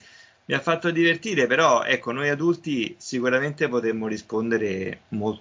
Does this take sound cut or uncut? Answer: uncut